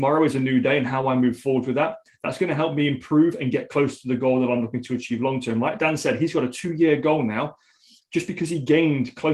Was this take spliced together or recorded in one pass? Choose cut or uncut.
uncut